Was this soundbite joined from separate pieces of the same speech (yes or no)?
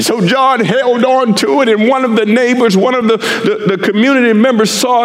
no